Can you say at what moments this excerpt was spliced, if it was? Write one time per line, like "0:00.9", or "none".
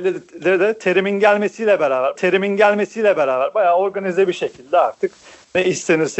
0:02.2